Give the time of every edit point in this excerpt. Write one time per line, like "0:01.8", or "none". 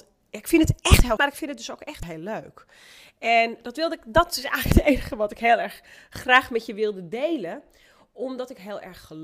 0:01.2